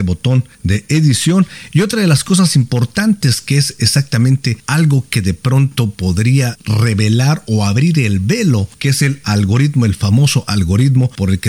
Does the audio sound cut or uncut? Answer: uncut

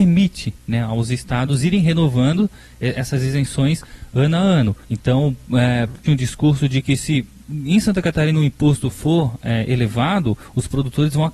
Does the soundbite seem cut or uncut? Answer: cut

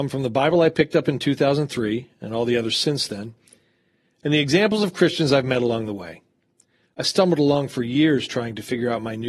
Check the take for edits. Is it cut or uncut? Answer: uncut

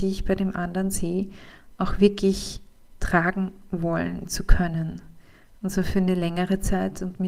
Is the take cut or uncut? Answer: uncut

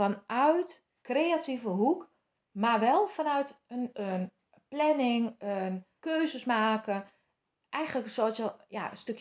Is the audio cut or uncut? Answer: cut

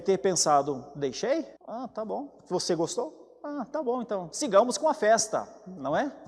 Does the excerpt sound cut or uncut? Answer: cut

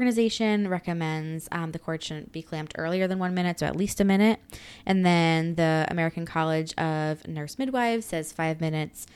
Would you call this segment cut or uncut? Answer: uncut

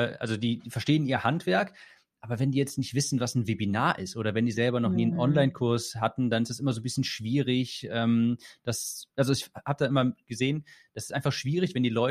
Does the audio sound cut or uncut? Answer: uncut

